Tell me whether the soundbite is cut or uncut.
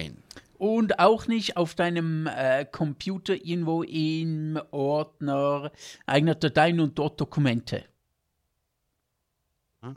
uncut